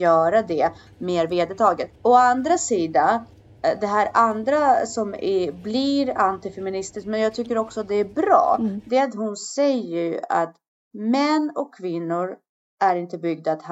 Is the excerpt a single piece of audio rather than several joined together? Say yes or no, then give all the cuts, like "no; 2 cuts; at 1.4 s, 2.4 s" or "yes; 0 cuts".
no; 1 cut; at 2.0 s